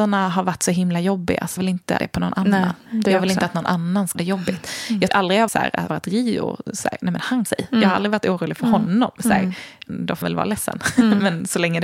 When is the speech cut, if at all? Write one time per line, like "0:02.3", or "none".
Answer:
0:01.6
0:02.0
0:04.1
0:05.1
0:05.5
0:05.9
0:07.5
0:09.9
0:10.2